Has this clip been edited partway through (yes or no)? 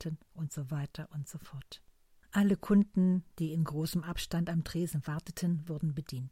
no